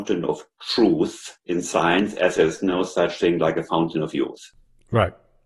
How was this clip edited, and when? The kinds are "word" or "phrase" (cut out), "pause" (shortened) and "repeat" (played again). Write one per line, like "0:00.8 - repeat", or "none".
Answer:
none